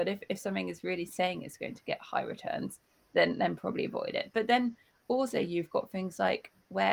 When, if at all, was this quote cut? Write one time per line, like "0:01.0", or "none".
none